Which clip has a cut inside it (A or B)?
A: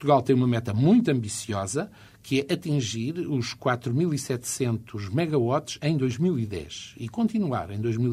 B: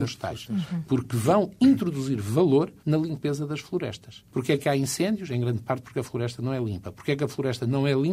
B